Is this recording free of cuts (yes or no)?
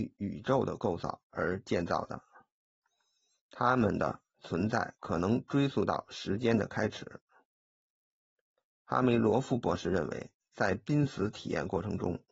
yes